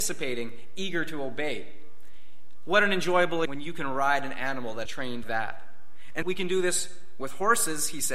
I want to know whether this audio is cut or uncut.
cut